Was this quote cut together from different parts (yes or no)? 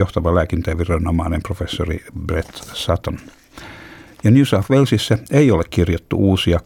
no